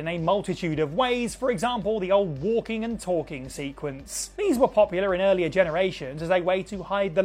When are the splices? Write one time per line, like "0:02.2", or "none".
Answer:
none